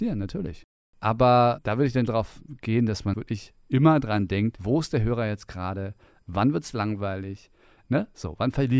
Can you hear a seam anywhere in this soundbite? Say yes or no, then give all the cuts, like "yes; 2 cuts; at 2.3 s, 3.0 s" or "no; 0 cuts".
yes; 2 cuts; at 2.1 s, 3.1 s